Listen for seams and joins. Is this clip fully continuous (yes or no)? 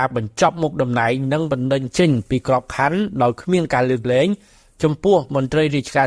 yes